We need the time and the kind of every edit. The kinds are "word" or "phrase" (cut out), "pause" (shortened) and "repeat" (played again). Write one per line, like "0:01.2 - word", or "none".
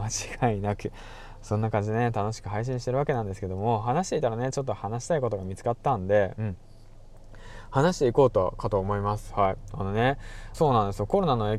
0:10.5 - phrase